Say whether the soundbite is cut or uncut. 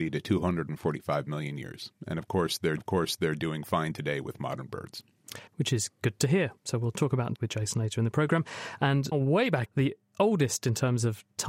cut